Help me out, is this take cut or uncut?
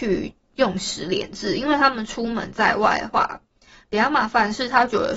uncut